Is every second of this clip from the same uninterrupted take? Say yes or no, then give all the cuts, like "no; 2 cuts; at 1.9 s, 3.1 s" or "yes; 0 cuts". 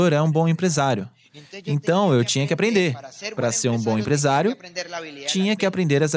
yes; 0 cuts